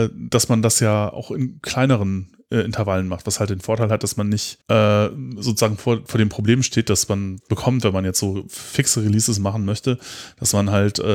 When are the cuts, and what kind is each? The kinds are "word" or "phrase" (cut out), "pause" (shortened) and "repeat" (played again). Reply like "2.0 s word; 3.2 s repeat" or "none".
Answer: 4.6 s pause